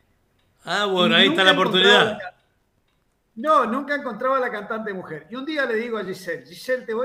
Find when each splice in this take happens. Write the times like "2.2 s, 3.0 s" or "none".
none